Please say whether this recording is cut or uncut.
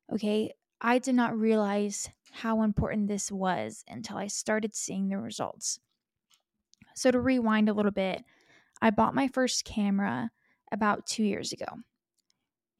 uncut